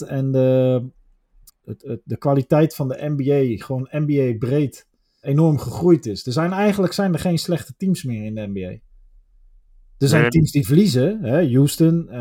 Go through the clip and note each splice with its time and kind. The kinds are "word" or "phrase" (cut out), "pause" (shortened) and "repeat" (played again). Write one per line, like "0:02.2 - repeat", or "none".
0:01.5 - word
0:05.2 - word